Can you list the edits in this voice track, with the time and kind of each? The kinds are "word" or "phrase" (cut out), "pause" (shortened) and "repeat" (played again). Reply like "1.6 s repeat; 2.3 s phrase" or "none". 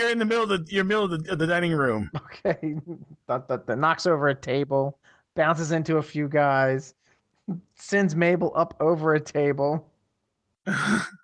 none

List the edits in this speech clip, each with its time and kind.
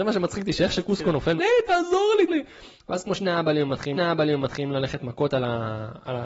1.4 s phrase; 2.3 s word; 3.9 s repeat

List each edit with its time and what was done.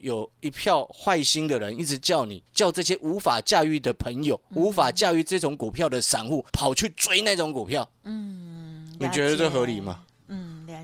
2.5 s pause; 4.5 s pause; 6.5 s pause

